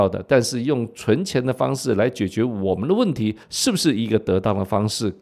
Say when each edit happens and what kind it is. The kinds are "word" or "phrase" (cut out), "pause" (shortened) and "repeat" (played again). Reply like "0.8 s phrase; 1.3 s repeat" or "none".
3.4 s pause